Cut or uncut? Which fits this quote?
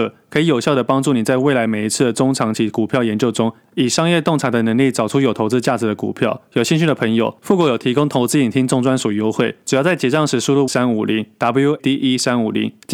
cut